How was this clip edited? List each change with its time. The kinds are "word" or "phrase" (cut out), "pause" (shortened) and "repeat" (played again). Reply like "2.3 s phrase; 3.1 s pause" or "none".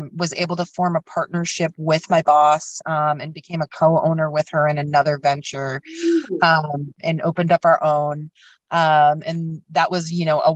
none

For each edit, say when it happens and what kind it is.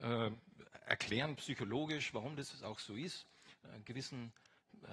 none

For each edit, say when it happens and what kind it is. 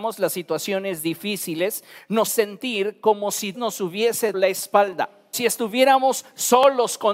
2.3 s word; 3.5 s word; 4.3 s word; 5.3 s word

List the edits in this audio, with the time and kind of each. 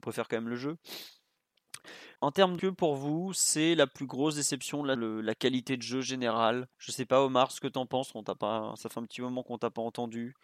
2.2 s pause; 2.6 s phrase; 4.9 s word; 6.7 s pause

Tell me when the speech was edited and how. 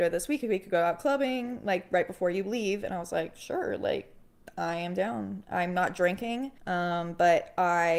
6.6 s pause

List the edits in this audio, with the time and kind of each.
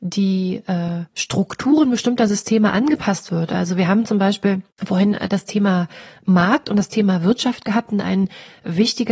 1.1 s pause; 4.7 s pause

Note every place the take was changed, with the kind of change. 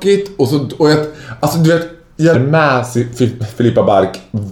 2.3 s word

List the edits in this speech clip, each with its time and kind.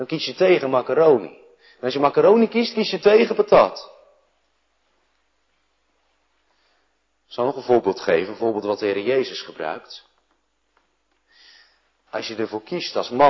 none

